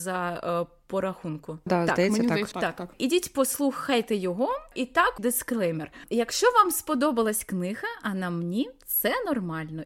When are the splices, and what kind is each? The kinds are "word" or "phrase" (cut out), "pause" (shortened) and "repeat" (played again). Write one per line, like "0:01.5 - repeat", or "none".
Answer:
0:01.7 - word
0:02.5 - word
0:02.9 - pause
0:05.2 - word